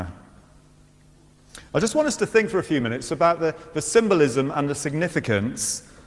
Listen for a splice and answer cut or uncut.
uncut